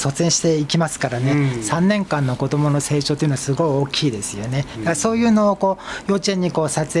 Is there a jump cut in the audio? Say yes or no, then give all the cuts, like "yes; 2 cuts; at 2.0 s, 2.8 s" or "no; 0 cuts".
no; 0 cuts